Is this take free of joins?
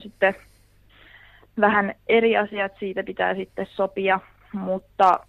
yes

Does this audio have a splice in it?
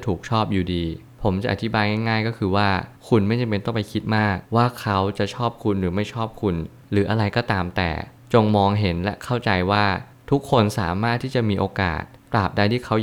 yes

